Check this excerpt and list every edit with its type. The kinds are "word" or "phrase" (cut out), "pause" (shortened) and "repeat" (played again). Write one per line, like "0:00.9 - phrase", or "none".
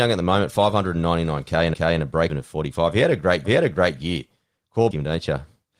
0:01.7 - repeat
0:02.3 - word
0:03.4 - repeat
0:04.9 - phrase